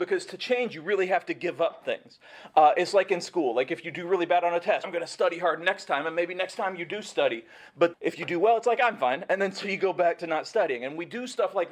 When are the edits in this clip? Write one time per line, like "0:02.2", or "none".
0:04.8
0:07.9